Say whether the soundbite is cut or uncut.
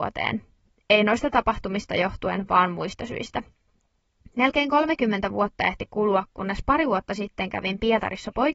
uncut